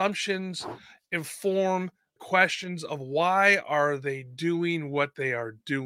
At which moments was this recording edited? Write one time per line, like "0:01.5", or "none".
0:02.2